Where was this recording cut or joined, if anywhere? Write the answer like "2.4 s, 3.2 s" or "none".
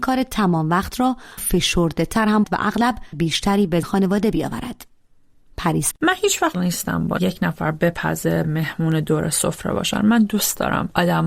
1.4 s, 2.4 s, 3.1 s, 3.8 s, 5.9 s, 6.5 s, 7.2 s, 8.4 s